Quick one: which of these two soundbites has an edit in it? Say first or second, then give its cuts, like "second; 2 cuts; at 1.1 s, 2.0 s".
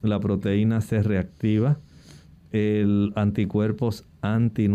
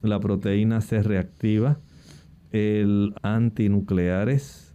second; 1 cut; at 3.1 s